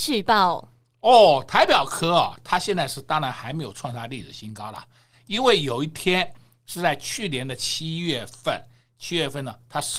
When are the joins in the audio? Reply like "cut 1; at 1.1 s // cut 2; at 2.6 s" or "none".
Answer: none